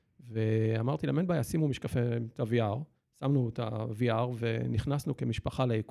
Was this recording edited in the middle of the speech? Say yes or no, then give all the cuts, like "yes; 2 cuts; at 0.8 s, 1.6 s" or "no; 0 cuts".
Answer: no; 0 cuts